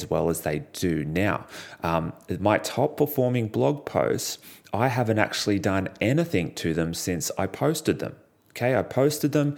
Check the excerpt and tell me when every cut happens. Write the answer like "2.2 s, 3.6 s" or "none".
none